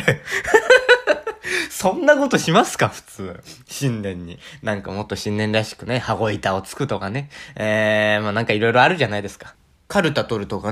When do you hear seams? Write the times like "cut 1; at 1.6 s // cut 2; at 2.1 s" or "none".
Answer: none

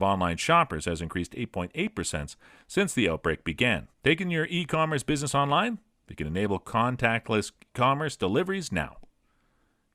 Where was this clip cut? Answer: cut 1; at 3.9 s

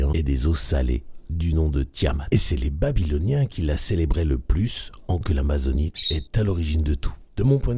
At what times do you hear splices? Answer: cut 1; at 5.2 s

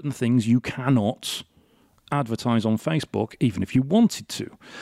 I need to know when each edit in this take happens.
none

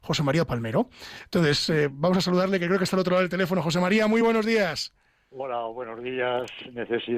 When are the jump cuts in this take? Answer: none

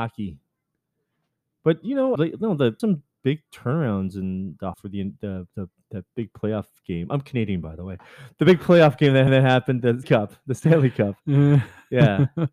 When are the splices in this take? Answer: cut 1; at 2.2 s // cut 2; at 2.8 s // cut 3; at 4.7 s // cut 4; at 5.5 s // cut 5; at 9.3 s // cut 6; at 10.0 s

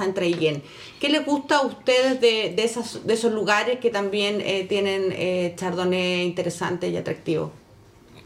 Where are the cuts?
none

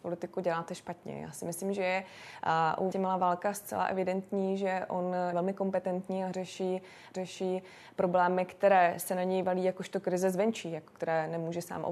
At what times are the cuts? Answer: cut 1; at 2.9 s // cut 2; at 5.3 s // cut 3; at 7.1 s

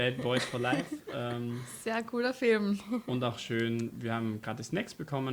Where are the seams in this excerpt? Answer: none

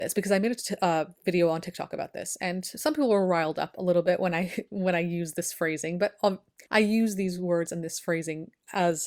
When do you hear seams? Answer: cut 1; at 6.7 s

